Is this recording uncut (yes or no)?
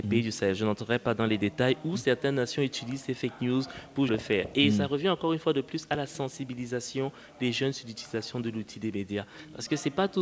no